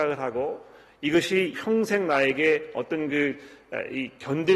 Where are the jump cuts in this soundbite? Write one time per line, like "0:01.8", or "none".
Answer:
0:01.5